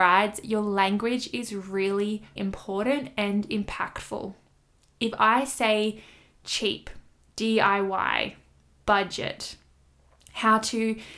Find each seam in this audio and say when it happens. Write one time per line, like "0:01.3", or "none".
0:02.4